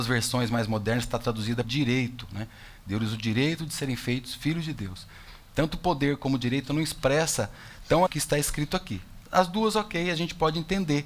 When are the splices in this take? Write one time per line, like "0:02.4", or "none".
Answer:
0:01.6
0:08.1